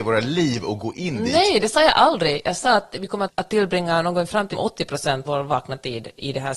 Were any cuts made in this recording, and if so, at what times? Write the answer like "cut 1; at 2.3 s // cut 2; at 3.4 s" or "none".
cut 1; at 3.3 s // cut 2; at 4.5 s // cut 3; at 5.2 s